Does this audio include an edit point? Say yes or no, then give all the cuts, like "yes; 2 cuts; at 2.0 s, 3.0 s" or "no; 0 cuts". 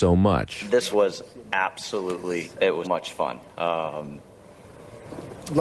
yes; 3 cuts; at 0.9 s, 2.5 s, 2.8 s